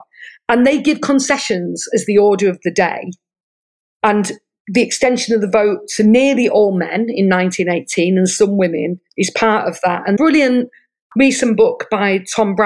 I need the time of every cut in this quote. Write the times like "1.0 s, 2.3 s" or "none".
9.1 s, 10.2 s